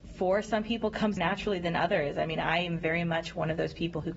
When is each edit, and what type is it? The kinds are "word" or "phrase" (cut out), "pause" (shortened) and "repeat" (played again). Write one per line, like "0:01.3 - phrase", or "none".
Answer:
0:01.2 - word